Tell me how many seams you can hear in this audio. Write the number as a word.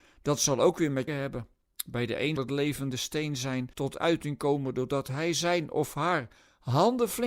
three